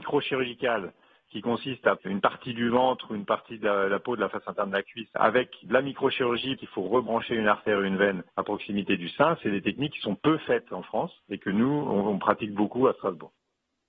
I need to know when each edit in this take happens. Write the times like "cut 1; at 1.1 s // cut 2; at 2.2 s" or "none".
cut 1; at 2.0 s // cut 2; at 6.6 s // cut 3; at 8.3 s // cut 4; at 11.2 s

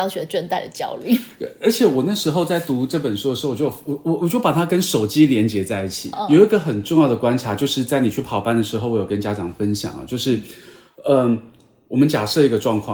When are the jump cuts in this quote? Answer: cut 1; at 6.1 s

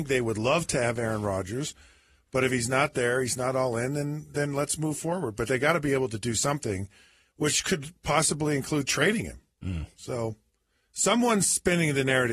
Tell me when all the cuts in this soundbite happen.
none

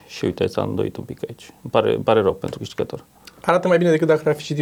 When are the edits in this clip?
none

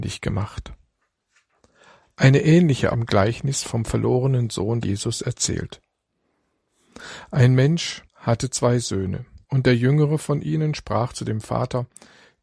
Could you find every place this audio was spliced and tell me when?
cut 1; at 2.9 s // cut 2; at 4.8 s // cut 3; at 8.1 s // cut 4; at 9.4 s

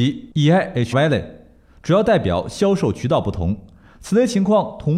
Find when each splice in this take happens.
cut 1; at 0.9 s

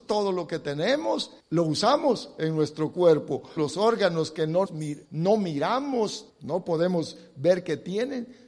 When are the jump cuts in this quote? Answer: cut 1; at 1.4 s // cut 2; at 3.6 s // cut 3; at 4.7 s // cut 4; at 5.0 s // cut 5; at 6.3 s

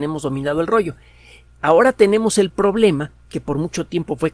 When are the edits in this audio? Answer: none

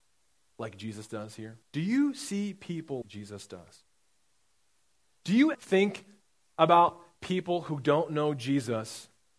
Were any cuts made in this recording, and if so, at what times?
cut 1; at 1.6 s // cut 2; at 3.0 s // cut 3; at 5.5 s

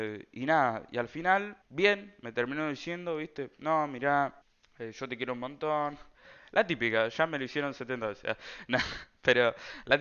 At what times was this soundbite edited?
cut 1; at 1.6 s // cut 2; at 4.4 s

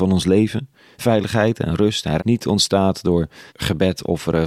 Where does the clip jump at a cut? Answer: cut 1; at 2.2 s // cut 2; at 3.5 s

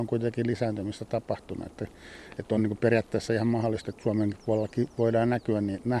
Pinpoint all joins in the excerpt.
none

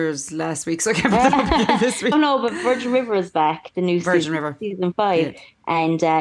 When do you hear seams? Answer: cut 1; at 2.1 s

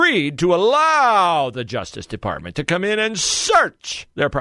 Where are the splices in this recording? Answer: none

